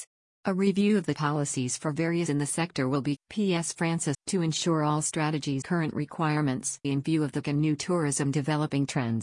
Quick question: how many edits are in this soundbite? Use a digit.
7